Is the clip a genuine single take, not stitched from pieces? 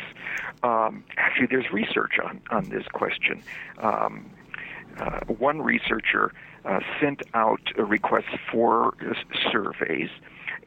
yes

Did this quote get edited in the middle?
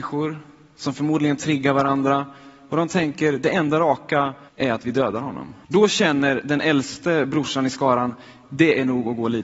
yes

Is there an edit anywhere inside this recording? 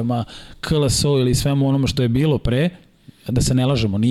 no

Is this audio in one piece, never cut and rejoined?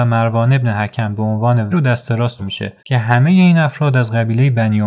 no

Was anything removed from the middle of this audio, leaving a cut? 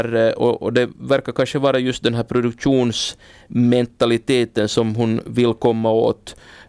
no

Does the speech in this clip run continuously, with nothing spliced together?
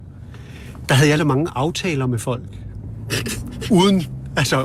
no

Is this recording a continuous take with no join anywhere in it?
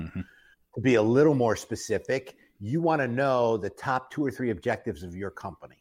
yes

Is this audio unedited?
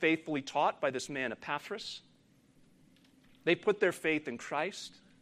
yes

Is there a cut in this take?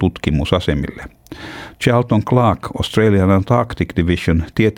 no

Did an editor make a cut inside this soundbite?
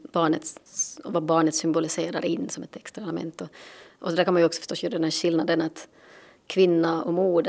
no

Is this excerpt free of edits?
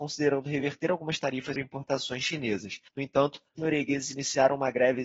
no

